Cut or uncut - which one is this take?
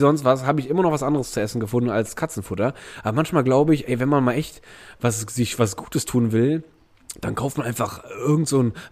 uncut